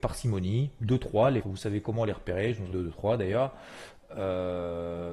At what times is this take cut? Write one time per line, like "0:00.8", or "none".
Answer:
0:01.4
0:02.7